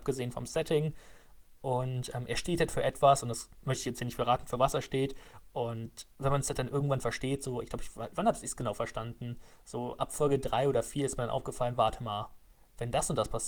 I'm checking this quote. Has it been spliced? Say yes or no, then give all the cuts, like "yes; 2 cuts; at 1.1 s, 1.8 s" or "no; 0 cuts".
no; 0 cuts